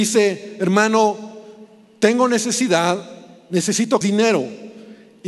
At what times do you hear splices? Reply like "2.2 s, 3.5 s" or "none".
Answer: 4.0 s